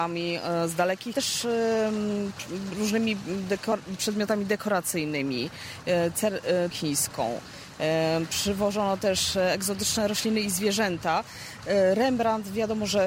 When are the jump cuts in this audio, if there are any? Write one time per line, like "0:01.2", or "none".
0:01.1
0:06.7